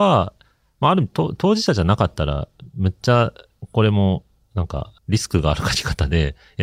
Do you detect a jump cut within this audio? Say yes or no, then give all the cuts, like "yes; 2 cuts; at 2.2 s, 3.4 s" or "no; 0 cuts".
yes; 1 cut; at 5.0 s